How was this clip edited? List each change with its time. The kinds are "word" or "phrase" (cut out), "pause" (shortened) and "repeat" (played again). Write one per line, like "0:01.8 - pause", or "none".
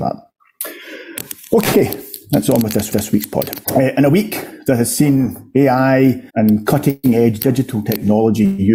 0:02.9 - repeat
0:03.6 - pause
0:06.3 - pause